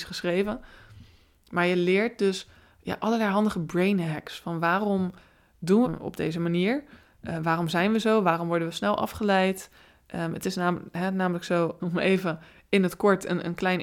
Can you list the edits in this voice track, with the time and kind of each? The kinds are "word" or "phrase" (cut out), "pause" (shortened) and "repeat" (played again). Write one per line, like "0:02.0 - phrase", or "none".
0:05.8 - phrase
0:11.8 - word